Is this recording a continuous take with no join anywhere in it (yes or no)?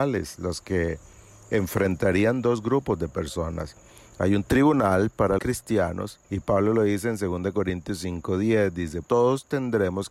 no